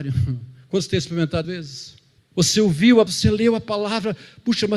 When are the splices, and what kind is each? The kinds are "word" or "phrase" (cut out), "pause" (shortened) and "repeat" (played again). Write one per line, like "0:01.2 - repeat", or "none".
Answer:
0:01.4 - phrase
0:02.2 - pause
0:03.1 - word

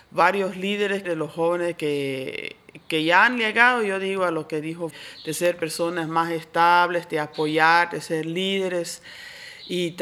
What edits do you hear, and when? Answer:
0:01.0 - phrase
0:04.9 - word

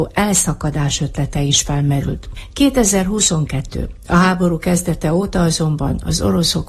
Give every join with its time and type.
none

